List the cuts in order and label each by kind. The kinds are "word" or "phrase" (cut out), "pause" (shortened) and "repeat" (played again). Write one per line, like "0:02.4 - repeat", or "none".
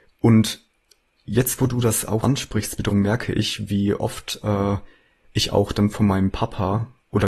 0:02.2 - word
0:02.9 - word